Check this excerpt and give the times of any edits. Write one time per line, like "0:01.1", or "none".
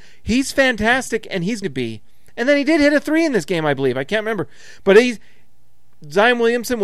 0:01.6

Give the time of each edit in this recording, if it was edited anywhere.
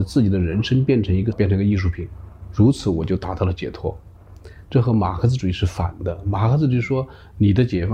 0:01.3

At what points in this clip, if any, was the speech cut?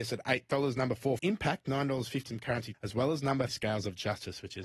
0:01.2
0:02.3
0:02.7
0:03.5

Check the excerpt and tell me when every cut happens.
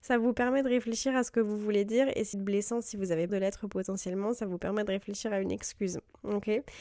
0:02.3
0:03.3

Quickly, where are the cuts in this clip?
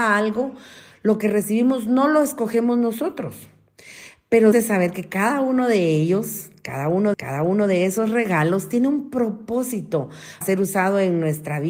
0:04.5
0:07.1
0:10.4

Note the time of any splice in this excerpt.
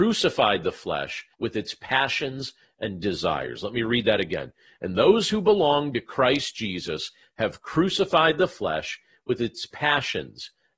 0:01.3

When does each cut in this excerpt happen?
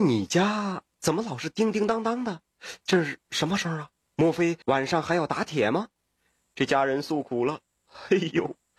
0:04.0
0:04.6
0:06.0

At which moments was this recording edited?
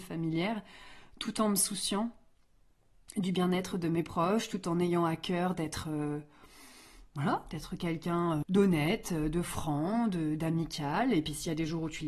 0:08.4

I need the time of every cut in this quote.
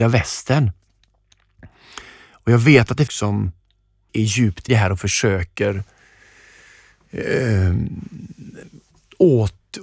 0:03.1
0:04.1
0:04.7

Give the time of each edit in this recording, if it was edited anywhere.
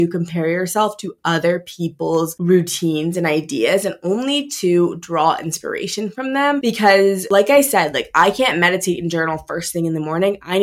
none

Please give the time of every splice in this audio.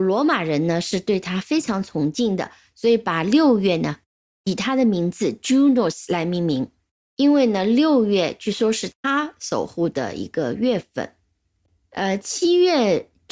none

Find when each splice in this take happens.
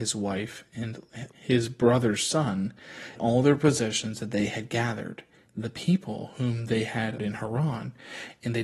0:01.3
0:03.2
0:05.5
0:07.2

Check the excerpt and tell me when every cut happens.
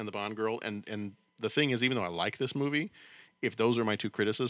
none

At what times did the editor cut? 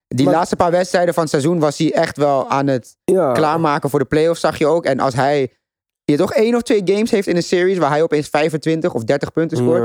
none

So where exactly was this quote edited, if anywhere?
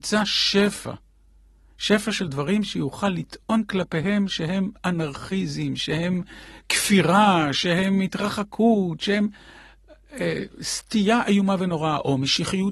none

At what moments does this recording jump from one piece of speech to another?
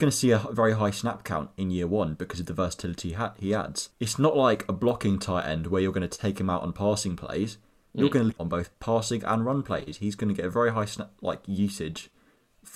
0:03.9
0:08.4

